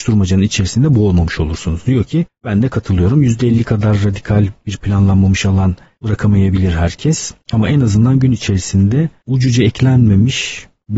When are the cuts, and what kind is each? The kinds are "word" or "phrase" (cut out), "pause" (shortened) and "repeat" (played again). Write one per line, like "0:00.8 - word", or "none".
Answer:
none